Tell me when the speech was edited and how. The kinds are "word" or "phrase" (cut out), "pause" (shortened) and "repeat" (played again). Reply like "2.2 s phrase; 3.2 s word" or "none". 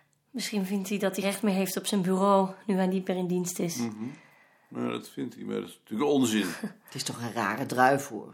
1.2 s word